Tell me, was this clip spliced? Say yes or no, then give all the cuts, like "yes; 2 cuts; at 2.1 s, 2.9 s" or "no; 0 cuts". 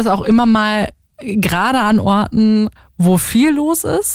no; 0 cuts